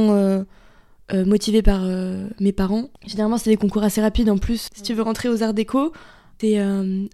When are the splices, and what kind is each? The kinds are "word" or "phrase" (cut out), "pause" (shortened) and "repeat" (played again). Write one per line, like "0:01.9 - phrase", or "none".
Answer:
0:03.0 - pause
0:04.7 - word